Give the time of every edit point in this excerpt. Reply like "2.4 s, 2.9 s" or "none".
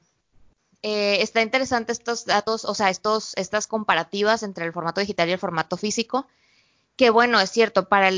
none